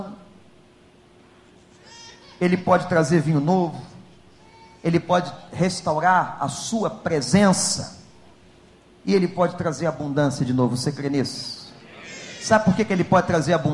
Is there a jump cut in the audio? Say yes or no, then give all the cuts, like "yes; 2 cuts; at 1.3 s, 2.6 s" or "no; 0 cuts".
no; 0 cuts